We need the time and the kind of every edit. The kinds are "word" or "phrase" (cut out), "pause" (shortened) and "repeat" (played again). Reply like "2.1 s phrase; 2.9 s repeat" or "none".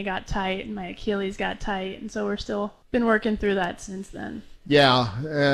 2.8 s pause